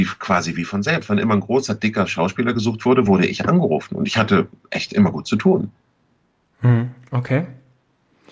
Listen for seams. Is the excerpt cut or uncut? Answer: uncut